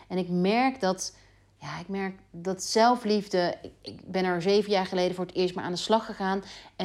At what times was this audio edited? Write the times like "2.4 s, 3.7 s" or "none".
none